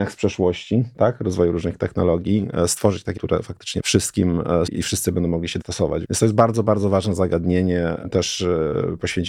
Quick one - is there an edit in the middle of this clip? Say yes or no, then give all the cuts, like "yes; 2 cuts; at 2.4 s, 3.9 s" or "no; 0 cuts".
yes; 5 cuts; at 3.2 s, 3.8 s, 4.7 s, 5.6 s, 6.0 s